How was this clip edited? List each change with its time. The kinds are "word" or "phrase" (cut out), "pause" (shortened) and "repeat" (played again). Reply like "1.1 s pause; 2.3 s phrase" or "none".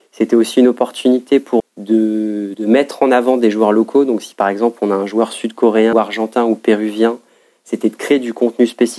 1.6 s word; 2.5 s word; 5.9 s word